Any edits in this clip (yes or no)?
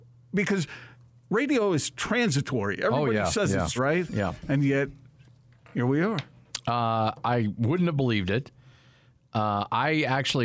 yes